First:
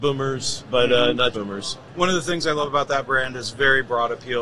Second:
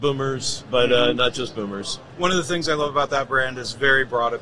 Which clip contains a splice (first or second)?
first